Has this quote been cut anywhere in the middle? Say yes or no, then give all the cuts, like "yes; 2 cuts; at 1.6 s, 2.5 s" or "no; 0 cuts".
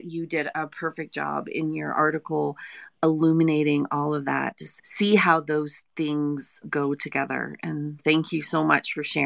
yes; 3 cuts; at 4.8 s, 6.6 s, 8.0 s